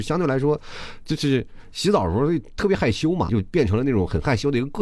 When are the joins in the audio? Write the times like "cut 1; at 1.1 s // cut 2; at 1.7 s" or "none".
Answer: cut 1; at 3.3 s